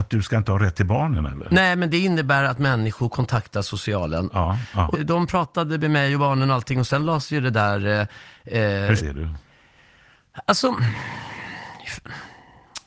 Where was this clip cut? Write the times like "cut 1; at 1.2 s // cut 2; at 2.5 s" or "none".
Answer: cut 1; at 4.9 s // cut 2; at 9.0 s

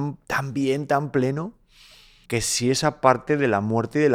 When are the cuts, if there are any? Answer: cut 1; at 2.2 s

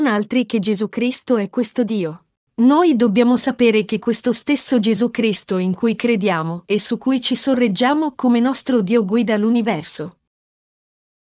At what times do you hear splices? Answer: none

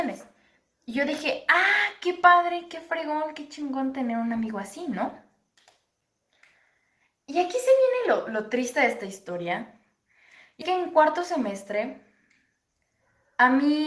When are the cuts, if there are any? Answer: cut 1; at 10.6 s

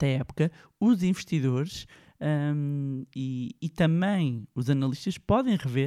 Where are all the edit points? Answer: none

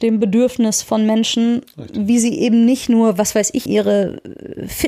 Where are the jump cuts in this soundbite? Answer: cut 1; at 3.7 s

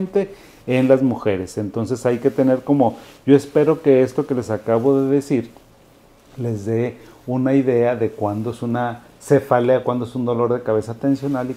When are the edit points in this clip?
none

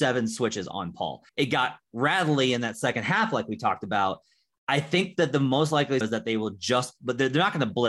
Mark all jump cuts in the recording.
cut 1; at 1.3 s // cut 2; at 6.0 s

